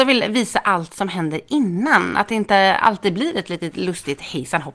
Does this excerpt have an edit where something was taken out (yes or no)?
no